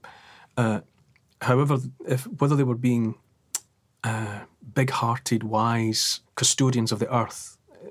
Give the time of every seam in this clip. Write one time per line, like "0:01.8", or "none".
0:03.7
0:06.3